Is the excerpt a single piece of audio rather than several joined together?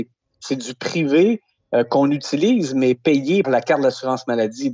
no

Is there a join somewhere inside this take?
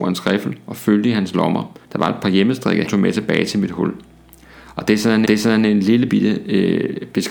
yes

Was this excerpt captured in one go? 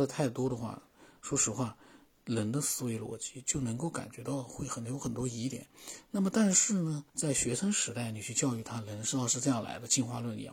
no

